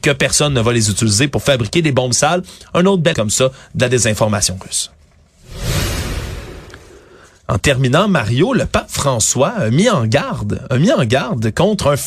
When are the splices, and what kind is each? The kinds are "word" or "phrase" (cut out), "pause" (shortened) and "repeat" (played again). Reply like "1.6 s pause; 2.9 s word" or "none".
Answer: 3.1 s word

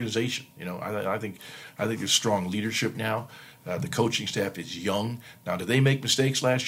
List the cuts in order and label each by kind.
2.9 s word

